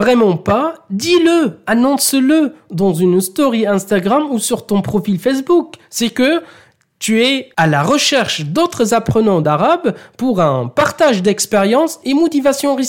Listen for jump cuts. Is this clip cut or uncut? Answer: uncut